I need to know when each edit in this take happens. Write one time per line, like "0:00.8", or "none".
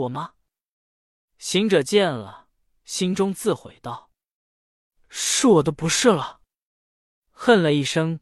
none

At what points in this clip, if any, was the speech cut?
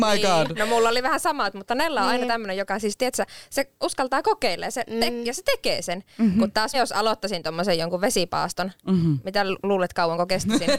0:06.7

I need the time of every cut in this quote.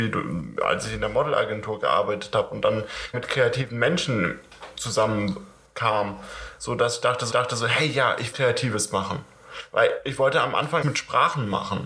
0:03.1
0:07.3
0:08.3
0:10.8

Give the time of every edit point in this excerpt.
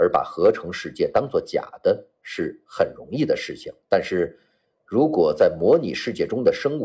0:03.8

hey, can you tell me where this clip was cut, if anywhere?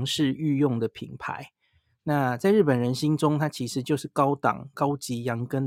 none

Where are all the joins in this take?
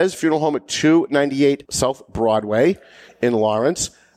none

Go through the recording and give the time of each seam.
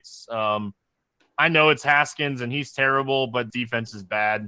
0:03.5

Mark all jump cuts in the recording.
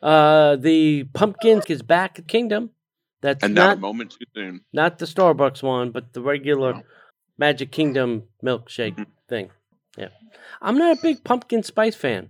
0:01.6
0:02.3
0:07.1
0:09.7

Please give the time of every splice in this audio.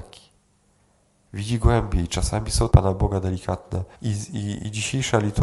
0:02.7
0:03.9

